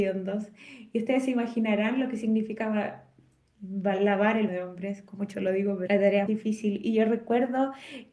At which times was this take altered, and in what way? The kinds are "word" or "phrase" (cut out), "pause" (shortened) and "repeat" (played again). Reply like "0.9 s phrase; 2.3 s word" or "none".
4.5 s word; 5.3 s word; 5.9 s word; 6.3 s word

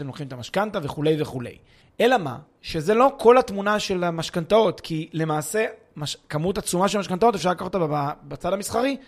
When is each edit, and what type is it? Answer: 1.8 s pause

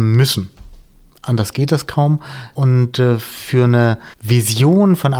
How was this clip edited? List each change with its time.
4.1 s pause

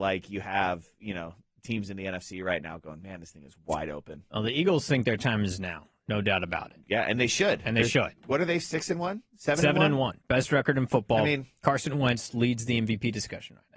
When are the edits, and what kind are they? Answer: none

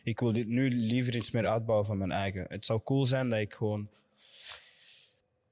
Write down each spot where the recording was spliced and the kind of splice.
none

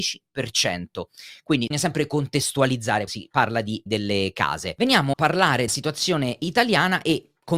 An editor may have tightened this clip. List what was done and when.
1.7 s word; 3.1 s word; 3.9 s word; 5.1 s word; 5.7 s word

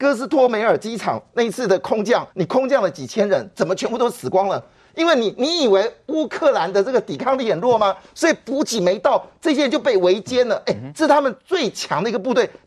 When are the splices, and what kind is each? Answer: 2.3 s pause

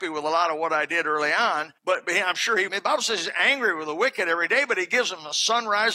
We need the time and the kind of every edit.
1.8 s pause; 2.7 s phrase

